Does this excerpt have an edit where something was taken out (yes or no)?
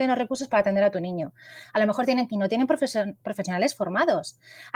yes